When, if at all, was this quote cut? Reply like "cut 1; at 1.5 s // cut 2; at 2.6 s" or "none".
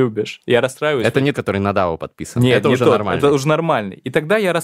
cut 1; at 1.3 s